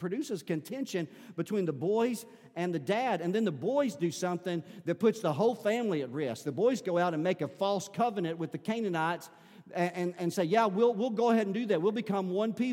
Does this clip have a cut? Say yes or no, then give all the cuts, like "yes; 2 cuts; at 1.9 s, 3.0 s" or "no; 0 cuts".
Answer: no; 0 cuts